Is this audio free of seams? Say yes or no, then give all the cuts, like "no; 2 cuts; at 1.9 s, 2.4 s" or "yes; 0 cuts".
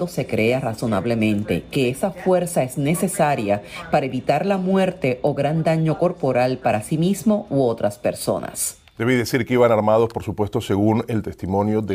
yes; 0 cuts